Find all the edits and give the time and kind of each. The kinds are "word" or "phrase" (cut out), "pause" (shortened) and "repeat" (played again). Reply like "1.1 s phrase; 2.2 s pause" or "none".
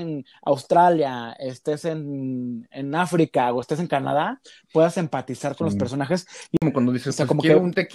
none